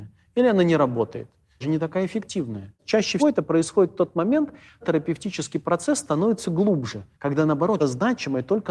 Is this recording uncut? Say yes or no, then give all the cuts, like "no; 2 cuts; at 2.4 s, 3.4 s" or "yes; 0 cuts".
no; 5 cuts; at 1.6 s, 3.2 s, 4.8 s, 7.1 s, 7.8 s